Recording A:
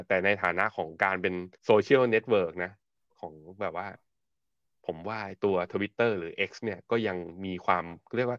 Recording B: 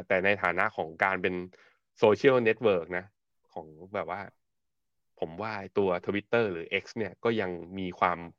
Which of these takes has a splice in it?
A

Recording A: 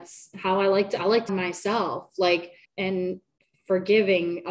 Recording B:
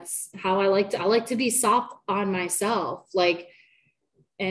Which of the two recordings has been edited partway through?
A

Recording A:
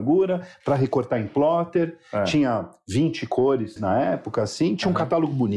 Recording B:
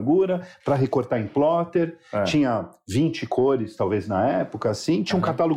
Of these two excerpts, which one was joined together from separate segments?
A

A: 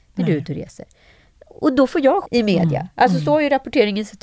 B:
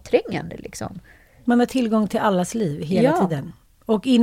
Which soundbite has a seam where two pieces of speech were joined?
A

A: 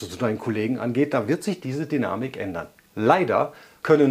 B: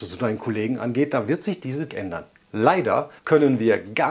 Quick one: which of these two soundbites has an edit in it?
B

